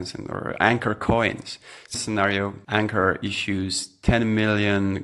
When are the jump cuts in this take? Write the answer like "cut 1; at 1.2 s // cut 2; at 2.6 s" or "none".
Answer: cut 1; at 1.9 s // cut 2; at 2.6 s

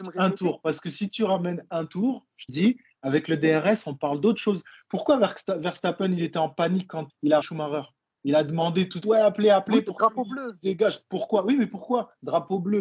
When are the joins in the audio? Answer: cut 1; at 2.5 s // cut 2; at 7.1 s // cut 3; at 7.4 s // cut 4; at 9.0 s

